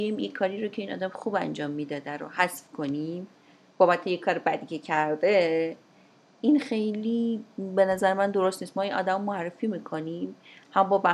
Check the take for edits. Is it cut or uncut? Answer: uncut